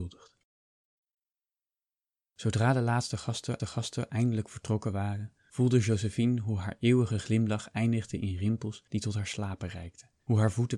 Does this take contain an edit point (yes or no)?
yes